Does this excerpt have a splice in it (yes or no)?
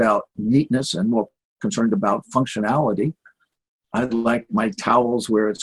no